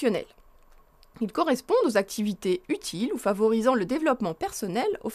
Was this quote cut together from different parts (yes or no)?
no